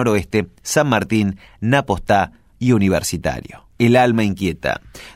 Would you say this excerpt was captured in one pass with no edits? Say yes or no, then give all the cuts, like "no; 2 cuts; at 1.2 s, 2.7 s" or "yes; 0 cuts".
no; 1 cut; at 3.7 s